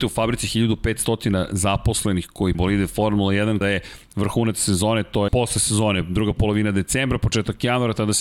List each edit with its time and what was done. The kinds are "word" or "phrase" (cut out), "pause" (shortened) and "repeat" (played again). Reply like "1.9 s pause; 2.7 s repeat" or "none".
2.5 s word; 3.6 s word; 5.3 s word